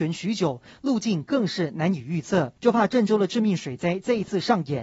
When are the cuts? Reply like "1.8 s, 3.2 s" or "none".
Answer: 2.6 s